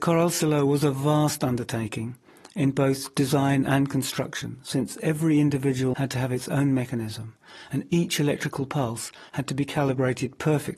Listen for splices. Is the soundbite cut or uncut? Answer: cut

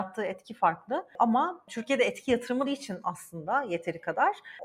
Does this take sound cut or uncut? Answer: cut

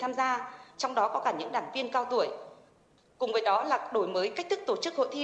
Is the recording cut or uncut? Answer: uncut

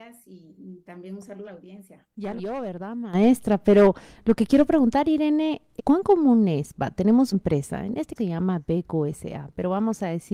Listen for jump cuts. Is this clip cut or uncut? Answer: cut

